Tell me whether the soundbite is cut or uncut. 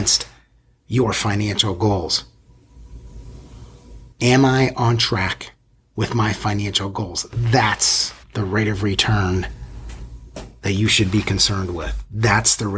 cut